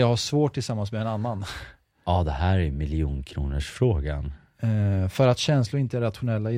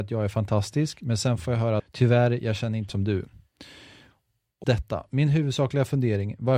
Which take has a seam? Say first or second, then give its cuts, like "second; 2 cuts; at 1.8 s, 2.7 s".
second; 3 cuts; at 1.8 s, 2.9 s, 4.6 s